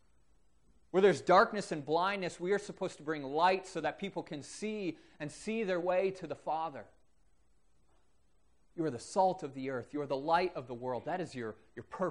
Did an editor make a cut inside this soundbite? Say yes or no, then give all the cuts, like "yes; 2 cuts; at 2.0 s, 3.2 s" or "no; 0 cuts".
no; 0 cuts